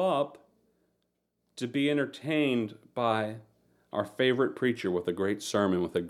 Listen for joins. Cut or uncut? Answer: uncut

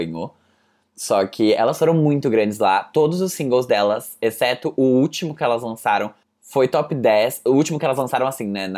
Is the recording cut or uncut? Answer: cut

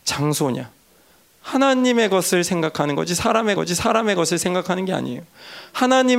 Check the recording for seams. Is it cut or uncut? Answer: cut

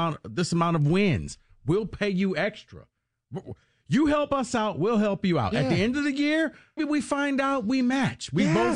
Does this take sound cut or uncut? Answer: cut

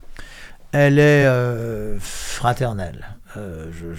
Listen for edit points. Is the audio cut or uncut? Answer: uncut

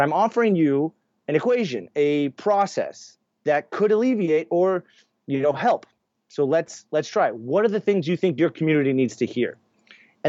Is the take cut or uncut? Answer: uncut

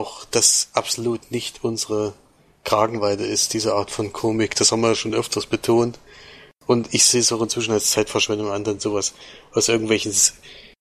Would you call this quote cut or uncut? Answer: uncut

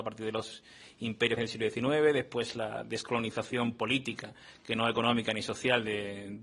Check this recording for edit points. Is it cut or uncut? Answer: cut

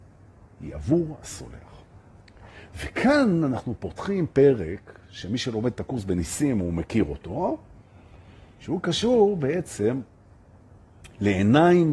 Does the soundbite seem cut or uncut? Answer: uncut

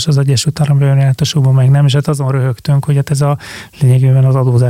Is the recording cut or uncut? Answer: uncut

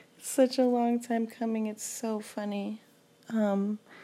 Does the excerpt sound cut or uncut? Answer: uncut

